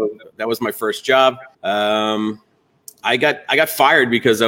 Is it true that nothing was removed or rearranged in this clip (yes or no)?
no